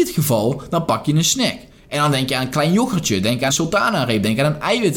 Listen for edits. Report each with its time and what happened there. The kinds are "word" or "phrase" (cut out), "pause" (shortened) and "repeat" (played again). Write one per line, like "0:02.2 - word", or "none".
0:03.5 - word